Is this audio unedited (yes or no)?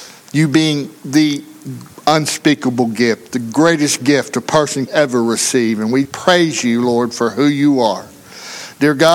no